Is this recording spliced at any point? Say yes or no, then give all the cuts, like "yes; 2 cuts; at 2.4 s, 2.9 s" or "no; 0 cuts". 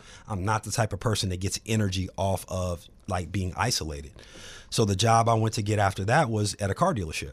no; 0 cuts